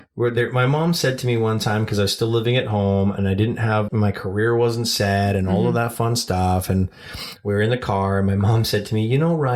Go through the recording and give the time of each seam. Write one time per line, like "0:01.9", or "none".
0:03.9